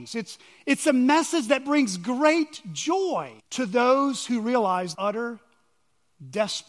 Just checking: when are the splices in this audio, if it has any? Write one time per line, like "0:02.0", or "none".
0:03.4
0:04.9

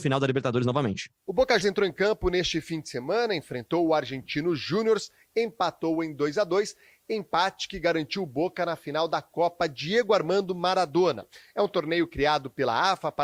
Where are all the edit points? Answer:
0:01.6

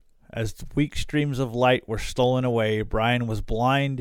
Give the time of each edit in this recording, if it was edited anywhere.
none

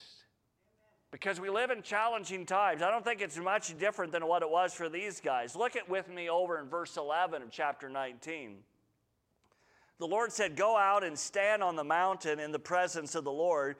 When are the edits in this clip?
none

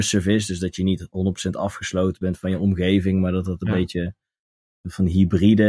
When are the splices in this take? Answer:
none

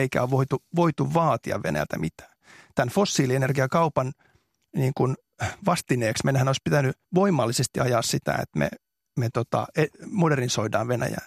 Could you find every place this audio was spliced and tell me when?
0:07.0

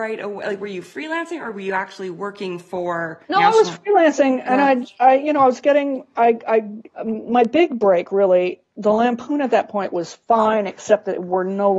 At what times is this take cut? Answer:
0:03.2
0:10.2

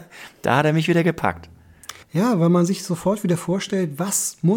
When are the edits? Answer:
0:02.0

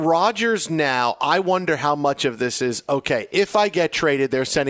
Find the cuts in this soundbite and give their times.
none

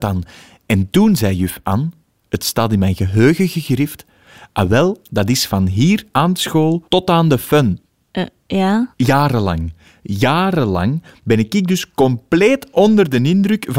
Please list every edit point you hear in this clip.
0:06.9

